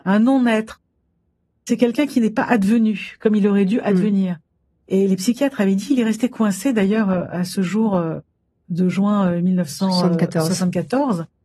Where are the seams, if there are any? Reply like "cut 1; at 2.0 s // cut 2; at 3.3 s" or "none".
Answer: none